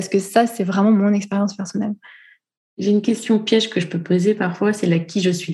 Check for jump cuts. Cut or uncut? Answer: uncut